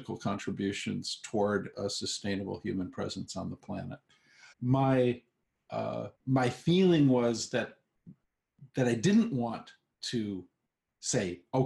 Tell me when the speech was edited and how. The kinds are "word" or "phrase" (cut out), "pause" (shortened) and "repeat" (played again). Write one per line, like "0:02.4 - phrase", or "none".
0:04.5 - word
0:06.2 - pause
0:08.7 - pause